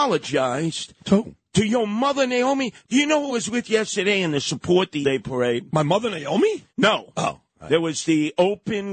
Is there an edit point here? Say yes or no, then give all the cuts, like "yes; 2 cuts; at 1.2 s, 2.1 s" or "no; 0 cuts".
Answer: yes; 3 cuts; at 3.3 s, 5.0 s, 6.7 s